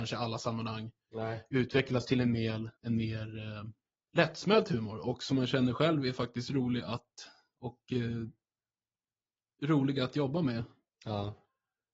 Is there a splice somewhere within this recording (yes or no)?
yes